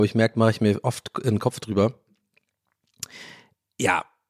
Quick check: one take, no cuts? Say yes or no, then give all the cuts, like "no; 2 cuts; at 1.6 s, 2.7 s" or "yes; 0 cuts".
yes; 0 cuts